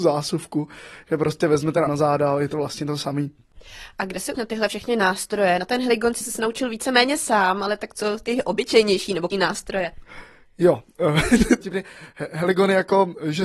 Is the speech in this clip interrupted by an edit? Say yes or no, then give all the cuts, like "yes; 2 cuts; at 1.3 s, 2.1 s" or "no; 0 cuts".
yes; 5 cuts; at 1.9 s, 4.3 s, 6.2 s, 9.3 s, 11.6 s